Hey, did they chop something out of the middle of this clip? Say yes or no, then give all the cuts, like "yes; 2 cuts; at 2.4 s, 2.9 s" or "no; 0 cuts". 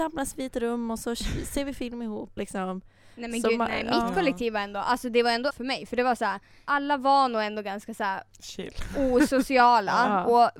yes; 2 cuts; at 2.4 s, 5.5 s